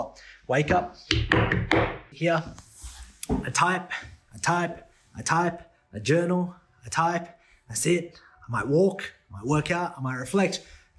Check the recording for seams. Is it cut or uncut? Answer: cut